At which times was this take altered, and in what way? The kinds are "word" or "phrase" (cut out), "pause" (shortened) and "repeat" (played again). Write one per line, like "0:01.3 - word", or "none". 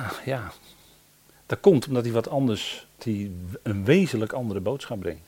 0:03.0 - word